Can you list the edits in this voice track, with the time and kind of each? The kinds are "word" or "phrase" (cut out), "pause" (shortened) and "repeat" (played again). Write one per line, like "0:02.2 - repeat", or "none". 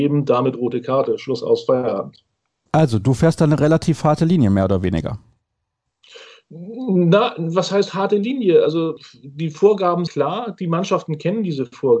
0:10.1 - word